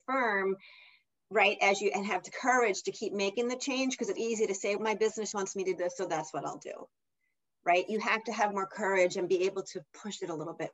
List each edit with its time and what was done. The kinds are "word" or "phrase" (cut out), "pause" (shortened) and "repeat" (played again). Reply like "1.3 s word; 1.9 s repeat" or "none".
4.2 s word; 4.8 s word; 5.3 s word; 5.8 s word